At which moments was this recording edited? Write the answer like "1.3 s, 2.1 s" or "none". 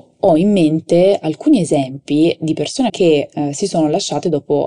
2.9 s